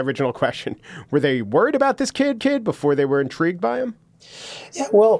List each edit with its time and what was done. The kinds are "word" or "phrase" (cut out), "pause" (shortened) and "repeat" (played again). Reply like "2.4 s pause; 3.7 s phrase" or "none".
2.4 s repeat